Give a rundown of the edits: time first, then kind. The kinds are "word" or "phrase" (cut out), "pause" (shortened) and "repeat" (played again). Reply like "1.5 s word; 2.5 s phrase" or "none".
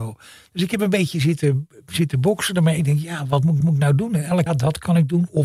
3.6 s repeat; 4.5 s phrase